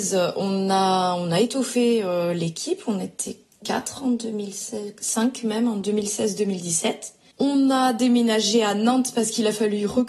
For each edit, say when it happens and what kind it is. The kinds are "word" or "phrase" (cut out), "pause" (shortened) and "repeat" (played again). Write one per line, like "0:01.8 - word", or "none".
none